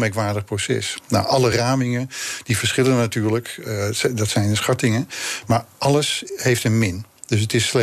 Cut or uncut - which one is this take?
uncut